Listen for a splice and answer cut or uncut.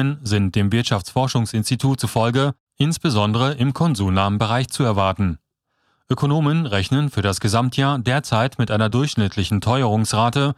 uncut